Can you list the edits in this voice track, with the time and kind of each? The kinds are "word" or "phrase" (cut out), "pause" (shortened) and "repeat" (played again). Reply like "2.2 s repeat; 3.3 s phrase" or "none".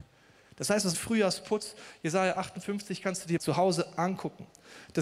0.9 s phrase; 3.4 s word